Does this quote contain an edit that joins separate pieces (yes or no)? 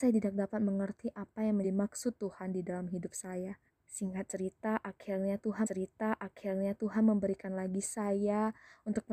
yes